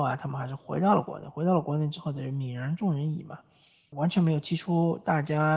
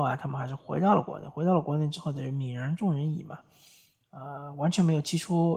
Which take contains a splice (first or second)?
first